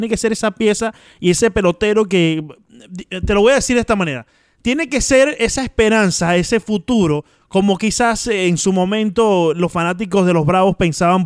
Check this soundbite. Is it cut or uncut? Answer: uncut